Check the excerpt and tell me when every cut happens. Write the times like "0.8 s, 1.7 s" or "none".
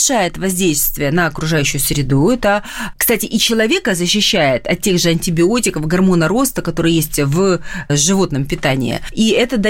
none

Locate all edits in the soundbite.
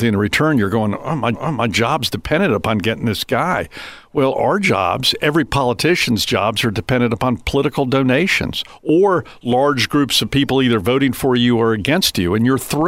1.3 s

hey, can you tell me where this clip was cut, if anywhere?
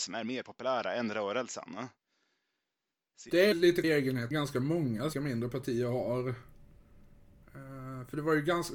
3.5 s, 3.8 s, 4.3 s, 5.1 s

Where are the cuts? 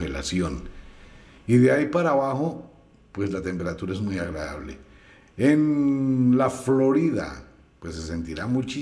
none

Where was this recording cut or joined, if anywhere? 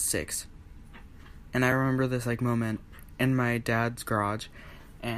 none

